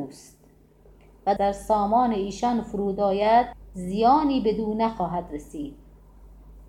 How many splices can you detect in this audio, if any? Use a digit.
1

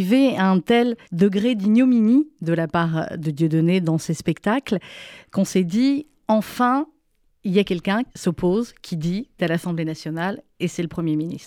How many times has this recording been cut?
3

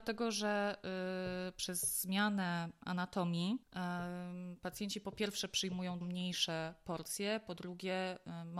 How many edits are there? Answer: 2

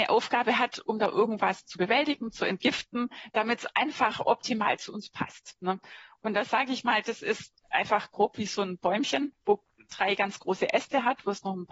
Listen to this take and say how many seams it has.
0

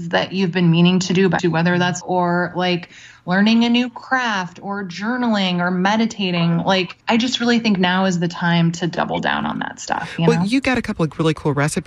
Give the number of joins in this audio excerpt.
3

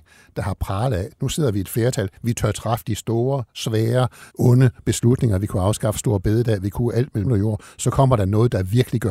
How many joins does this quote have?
2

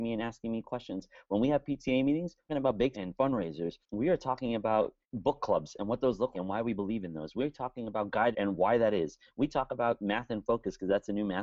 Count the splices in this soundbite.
6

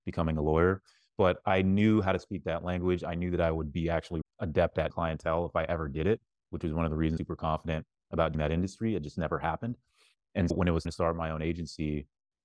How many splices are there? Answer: 6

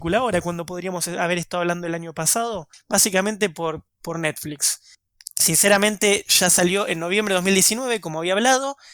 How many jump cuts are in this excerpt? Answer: 0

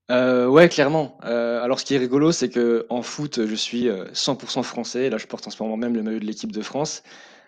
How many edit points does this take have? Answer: 0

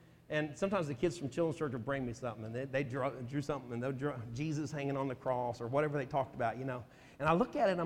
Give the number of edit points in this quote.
0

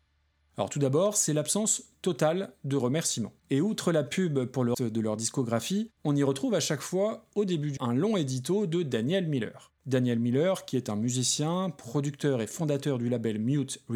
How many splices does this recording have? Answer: 5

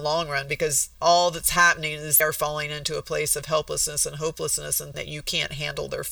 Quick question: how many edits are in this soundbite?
3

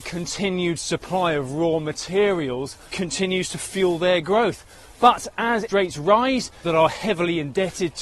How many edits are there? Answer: 3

